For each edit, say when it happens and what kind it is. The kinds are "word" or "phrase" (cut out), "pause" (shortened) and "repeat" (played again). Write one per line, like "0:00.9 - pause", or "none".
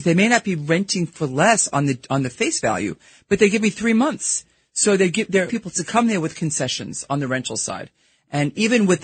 0:05.5 - word